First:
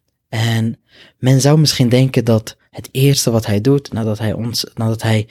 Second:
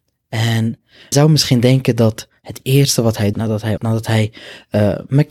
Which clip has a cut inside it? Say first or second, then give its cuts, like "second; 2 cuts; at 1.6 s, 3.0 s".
second; 3 cuts; at 1.1 s, 3.3 s, 3.8 s